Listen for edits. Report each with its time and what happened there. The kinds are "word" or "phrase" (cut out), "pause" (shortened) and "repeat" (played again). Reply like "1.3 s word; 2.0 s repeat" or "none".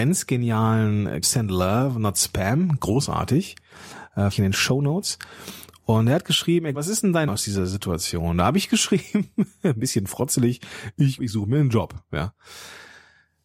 1.2 s word; 4.3 s word; 6.7 s word; 7.3 s word; 11.2 s word